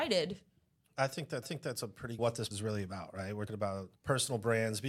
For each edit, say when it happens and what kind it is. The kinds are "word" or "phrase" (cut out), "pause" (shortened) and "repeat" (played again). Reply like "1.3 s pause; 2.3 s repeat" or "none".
1.4 s repeat; 2.2 s phrase; 2.5 s word; 3.5 s word; 4.0 s pause